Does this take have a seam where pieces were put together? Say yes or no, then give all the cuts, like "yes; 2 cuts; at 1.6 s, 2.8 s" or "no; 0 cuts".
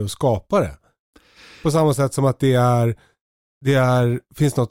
no; 0 cuts